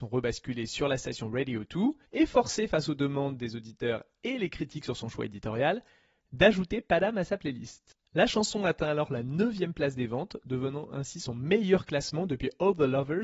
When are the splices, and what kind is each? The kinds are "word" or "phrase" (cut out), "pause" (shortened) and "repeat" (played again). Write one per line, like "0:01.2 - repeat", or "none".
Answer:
0:02.1 - pause